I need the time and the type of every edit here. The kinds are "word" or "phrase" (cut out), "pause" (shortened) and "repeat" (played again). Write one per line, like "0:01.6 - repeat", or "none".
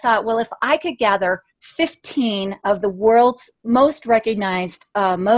0:01.5 - pause
0:03.5 - pause